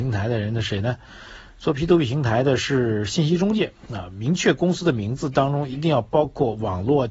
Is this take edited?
no; 0 cuts

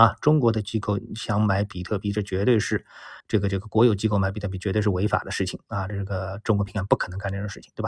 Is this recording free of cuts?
no; 1 cut; at 3.2 s

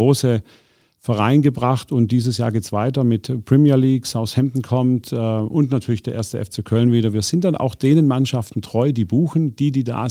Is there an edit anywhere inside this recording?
no; 0 cuts

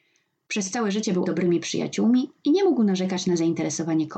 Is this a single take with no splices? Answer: no; 1 cut; at 1.3 s

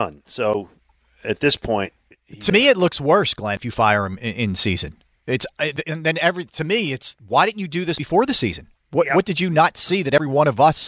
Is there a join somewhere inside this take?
yes; 1 cut; at 2.1 s

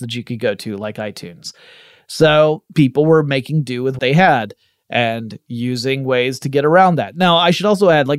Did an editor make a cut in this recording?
yes; 2 cuts; at 2.7 s, 4.0 s

